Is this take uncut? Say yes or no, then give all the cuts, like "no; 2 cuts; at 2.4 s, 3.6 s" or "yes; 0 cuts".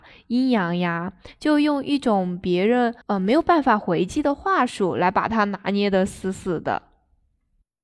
no; 1 cut; at 3.0 s